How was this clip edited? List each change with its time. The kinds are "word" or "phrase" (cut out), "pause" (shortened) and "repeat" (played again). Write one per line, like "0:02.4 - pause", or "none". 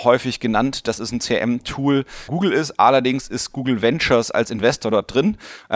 0:02.3 - phrase